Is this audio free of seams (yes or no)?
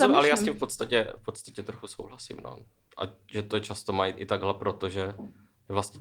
yes